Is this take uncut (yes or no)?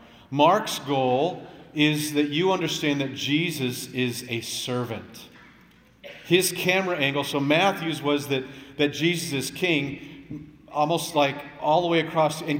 yes